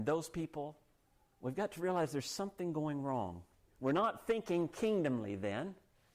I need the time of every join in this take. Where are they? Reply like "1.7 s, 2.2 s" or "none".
none